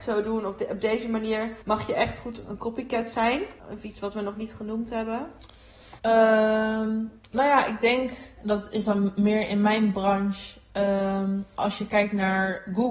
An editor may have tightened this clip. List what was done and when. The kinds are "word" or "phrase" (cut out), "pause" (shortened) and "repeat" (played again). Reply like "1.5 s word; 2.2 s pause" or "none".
1.6 s pause; 3.6 s pause; 6.0 s pause